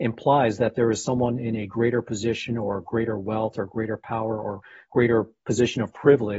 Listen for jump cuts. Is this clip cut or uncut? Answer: uncut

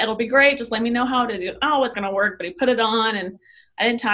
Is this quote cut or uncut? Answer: cut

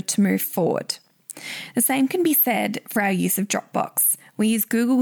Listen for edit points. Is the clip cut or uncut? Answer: uncut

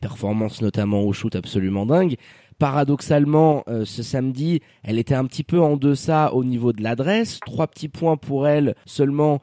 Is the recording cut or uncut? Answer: uncut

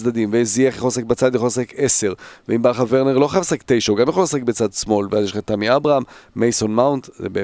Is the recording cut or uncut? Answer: cut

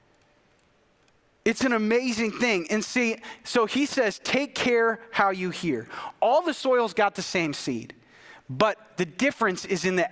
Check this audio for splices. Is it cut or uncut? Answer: uncut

